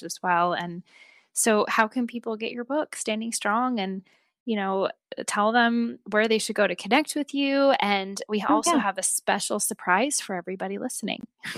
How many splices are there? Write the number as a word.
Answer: zero